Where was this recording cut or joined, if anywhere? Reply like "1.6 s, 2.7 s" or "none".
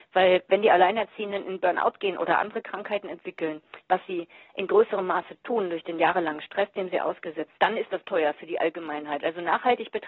7.6 s, 8.0 s